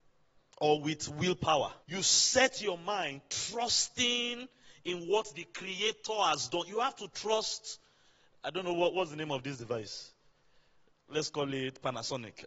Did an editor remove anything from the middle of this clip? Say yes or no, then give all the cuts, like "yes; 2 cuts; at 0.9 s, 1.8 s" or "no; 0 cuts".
yes; 1 cut; at 1.8 s